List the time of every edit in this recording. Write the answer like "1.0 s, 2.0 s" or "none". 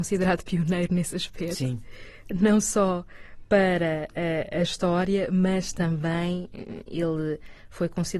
none